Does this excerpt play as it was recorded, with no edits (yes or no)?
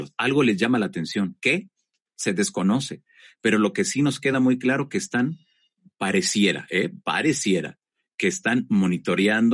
yes